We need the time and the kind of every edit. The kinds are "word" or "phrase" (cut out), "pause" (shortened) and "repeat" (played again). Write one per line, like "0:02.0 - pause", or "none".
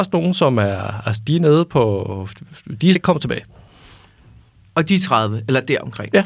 0:03.0 - word